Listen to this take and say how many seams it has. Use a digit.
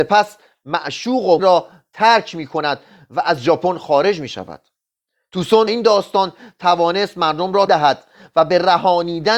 3